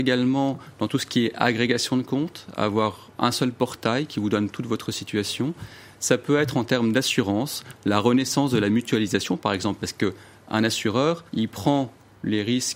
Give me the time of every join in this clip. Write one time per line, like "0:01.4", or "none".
0:11.3